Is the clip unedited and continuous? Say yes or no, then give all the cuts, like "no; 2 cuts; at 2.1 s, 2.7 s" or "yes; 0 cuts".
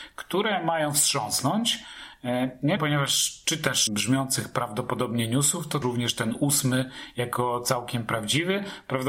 no; 3 cuts; at 2.8 s, 3.9 s, 5.8 s